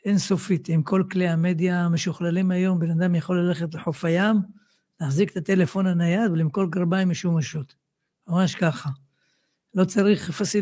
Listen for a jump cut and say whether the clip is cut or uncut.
uncut